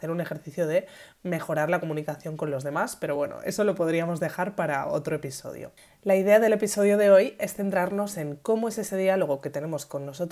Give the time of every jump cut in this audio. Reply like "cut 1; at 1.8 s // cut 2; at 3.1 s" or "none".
none